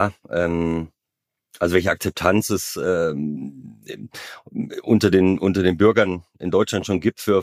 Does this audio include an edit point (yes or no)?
no